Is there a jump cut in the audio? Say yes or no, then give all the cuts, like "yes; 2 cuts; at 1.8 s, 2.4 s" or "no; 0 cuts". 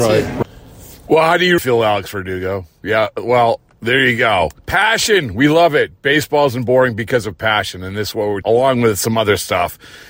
yes; 3 cuts; at 1.6 s, 4.6 s, 8.4 s